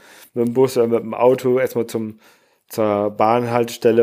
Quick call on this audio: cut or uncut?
uncut